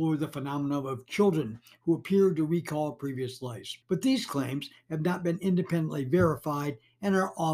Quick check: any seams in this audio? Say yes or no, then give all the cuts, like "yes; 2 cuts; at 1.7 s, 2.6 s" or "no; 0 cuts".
yes; 1 cut; at 3.8 s